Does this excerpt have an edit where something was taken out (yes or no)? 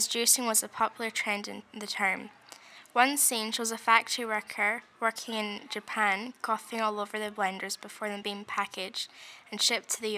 no